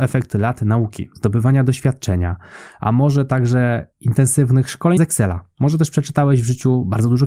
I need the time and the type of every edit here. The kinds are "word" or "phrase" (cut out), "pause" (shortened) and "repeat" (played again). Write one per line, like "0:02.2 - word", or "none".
0:03.9 - pause
0:05.0 - phrase